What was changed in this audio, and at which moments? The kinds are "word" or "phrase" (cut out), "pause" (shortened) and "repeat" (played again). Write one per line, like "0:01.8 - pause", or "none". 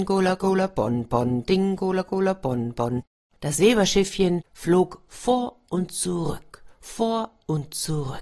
none